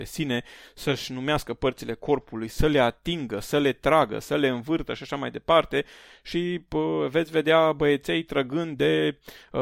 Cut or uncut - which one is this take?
uncut